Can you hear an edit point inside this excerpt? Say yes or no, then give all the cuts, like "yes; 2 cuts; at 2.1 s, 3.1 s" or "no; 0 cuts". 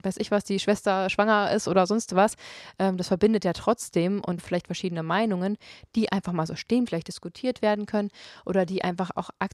yes; 2 cuts; at 4.4 s, 6.9 s